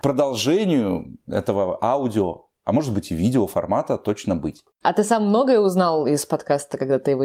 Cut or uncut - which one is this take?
uncut